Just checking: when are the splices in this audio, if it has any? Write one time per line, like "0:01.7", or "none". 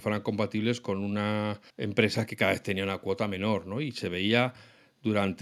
0:01.7